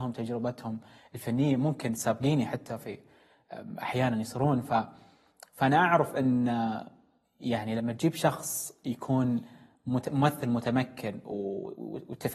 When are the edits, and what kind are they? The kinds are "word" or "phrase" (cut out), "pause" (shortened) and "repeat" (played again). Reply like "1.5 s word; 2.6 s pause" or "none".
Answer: none